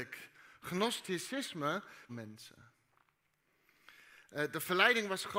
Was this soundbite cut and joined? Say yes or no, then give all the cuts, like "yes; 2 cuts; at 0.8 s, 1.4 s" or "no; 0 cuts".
yes; 1 cut; at 2.1 s